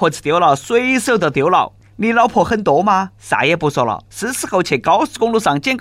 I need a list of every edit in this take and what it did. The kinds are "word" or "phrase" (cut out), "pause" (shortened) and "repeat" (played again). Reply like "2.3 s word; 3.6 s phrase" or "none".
3.2 s pause